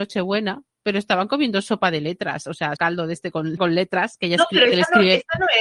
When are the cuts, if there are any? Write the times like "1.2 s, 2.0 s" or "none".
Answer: 2.8 s, 3.6 s